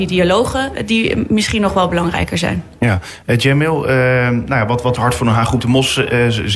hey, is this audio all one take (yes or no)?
no